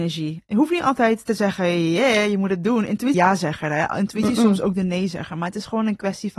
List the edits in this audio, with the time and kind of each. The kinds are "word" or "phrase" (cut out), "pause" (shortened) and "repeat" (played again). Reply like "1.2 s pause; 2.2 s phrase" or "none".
3.1 s phrase